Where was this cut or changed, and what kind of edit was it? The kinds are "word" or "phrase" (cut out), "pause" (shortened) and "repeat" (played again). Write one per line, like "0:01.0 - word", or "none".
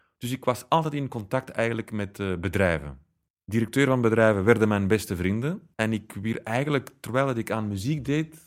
0:03.3 - pause
0:05.7 - pause